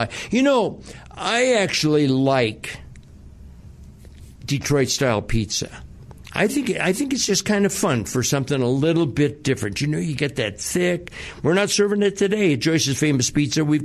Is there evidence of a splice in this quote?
no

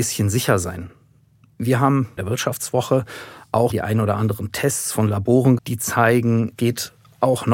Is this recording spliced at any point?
yes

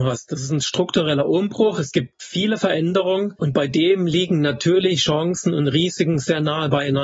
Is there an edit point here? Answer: no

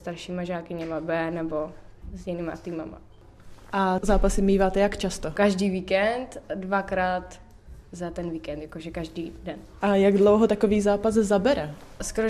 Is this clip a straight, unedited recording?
yes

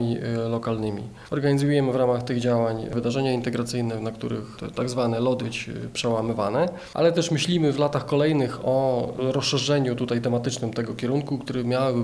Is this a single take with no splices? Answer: no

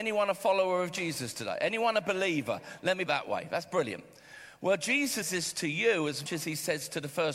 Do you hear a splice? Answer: yes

